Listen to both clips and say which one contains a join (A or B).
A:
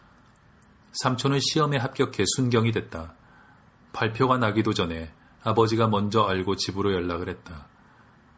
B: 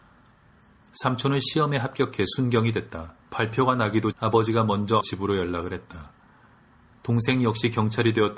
B